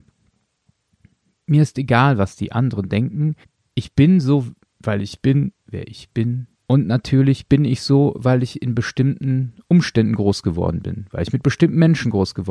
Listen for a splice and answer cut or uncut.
cut